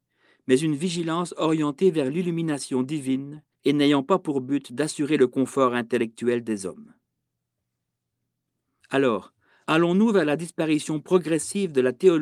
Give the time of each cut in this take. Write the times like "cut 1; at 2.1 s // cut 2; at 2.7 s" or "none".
cut 1; at 3.5 s